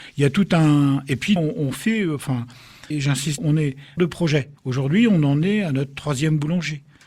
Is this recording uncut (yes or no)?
no